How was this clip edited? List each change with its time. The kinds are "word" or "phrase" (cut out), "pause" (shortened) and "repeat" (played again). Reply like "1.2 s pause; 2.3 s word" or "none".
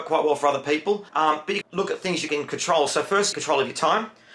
1.1 s pause; 1.6 s phrase; 2.3 s phrase; 3.3 s word